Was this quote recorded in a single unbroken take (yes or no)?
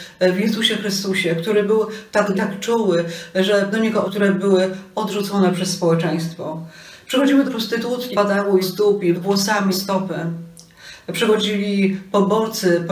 no